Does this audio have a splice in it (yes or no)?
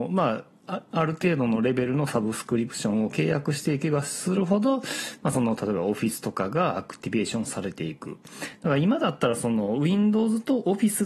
no